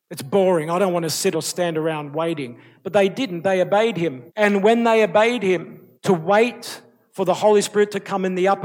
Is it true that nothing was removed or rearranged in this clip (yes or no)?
no